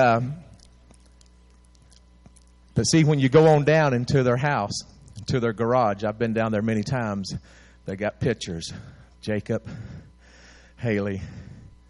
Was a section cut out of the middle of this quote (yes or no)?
no